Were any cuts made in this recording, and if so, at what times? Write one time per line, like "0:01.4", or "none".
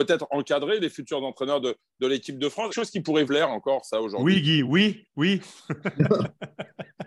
0:02.7
0:03.3
0:04.6